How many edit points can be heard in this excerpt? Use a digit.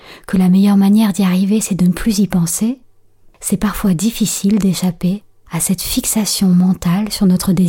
0